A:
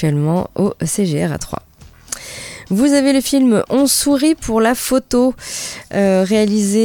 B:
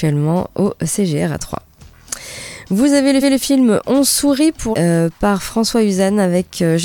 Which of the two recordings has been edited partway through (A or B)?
B